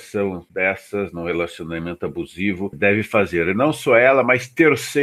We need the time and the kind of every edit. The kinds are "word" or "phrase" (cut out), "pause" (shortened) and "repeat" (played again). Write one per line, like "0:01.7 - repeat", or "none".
0:02.7 - word

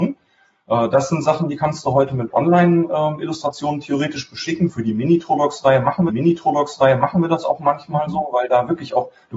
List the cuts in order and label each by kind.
0:06.1 - repeat

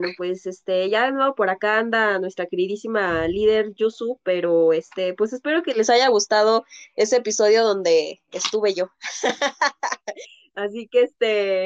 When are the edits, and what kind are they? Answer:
none

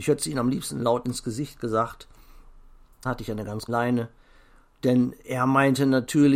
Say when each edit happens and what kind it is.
0:03.0 - word
0:03.7 - word

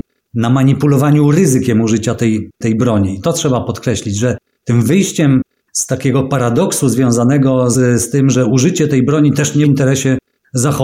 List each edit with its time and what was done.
0:02.5 - pause
0:03.2 - word
0:07.7 - word
0:09.6 - phrase

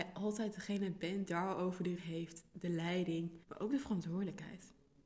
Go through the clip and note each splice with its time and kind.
0:01.3 - word
0:02.0 - word
0:03.4 - pause

